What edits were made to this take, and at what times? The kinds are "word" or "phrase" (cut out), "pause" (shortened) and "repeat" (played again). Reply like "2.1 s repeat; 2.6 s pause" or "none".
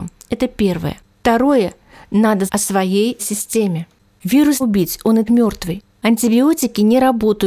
2.5 s word; 3.2 s word; 4.6 s word; 5.3 s word